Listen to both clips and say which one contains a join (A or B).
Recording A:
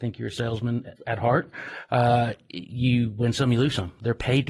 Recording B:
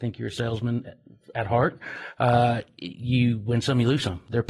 A